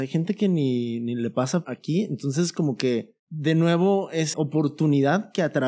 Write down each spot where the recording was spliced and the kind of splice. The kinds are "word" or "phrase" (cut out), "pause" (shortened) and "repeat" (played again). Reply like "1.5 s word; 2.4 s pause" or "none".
1.6 s word; 3.2 s pause; 4.3 s word